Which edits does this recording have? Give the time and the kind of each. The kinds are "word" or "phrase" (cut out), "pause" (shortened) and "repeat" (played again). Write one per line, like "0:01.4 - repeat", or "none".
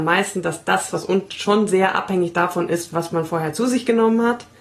0:01.3 - word

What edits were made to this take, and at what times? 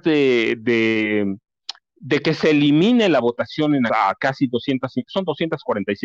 0:03.9 - word

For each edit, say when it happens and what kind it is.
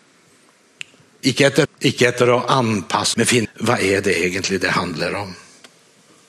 0:01.7 - word
0:03.1 - word
0:03.4 - word

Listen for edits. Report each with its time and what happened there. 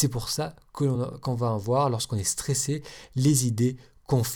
none

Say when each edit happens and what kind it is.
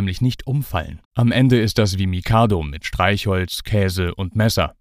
0:01.0 - pause

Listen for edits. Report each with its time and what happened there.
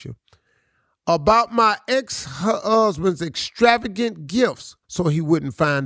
0:04.8 - pause

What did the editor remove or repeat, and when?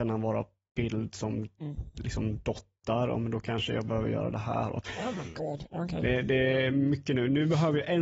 none

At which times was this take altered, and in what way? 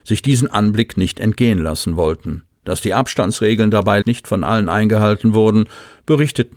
0:04.0 - word

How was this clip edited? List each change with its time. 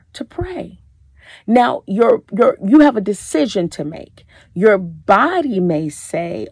none

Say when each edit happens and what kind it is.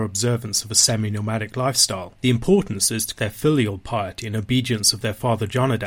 0:02.2 - pause
0:03.2 - word

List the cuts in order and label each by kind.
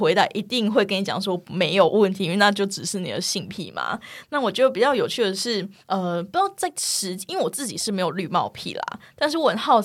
0:05.8 - pause

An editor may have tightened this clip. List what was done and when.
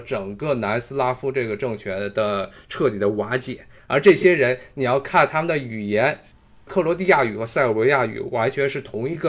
none

